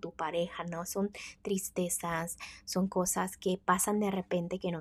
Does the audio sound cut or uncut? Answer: uncut